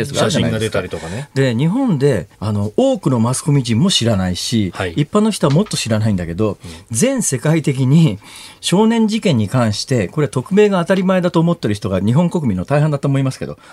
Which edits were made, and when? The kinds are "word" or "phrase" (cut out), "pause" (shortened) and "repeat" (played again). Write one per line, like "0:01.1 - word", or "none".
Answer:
0:02.3 - pause